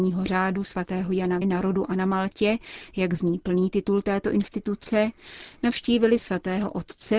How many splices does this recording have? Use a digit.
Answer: 1